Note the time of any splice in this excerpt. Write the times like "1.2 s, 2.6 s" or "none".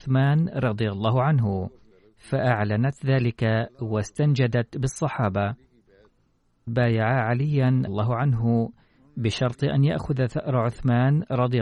1.9 s, 6.7 s, 7.9 s